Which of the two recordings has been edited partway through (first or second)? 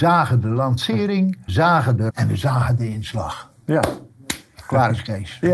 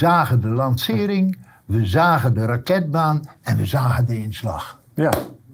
first